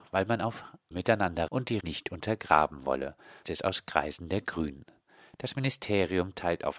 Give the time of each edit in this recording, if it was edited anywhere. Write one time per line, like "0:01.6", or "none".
0:00.9
0:01.5
0:01.8
0:03.4